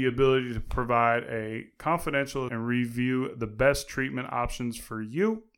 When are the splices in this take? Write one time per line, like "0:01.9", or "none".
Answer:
0:02.5